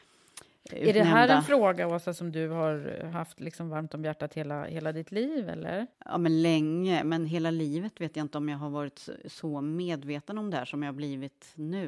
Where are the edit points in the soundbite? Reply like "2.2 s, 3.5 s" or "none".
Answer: 5.9 s

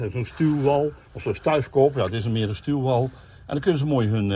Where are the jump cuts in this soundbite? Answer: 1.0 s

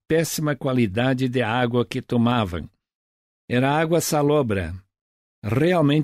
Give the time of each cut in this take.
none

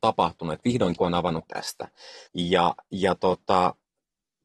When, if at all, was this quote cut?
1.0 s, 1.5 s, 2.3 s

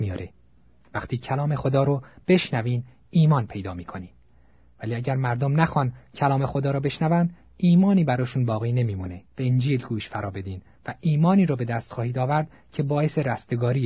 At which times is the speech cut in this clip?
9.3 s

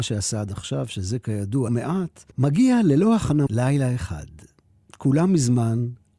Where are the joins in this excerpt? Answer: 1.7 s, 2.3 s, 3.5 s

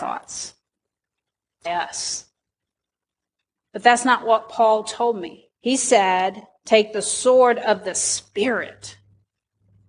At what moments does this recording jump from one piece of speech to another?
1.7 s, 5.6 s

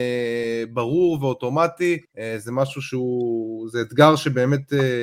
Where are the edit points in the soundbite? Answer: 2.0 s

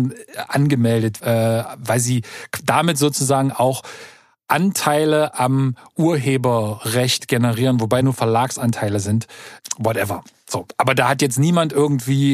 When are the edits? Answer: 1.2 s, 8.0 s

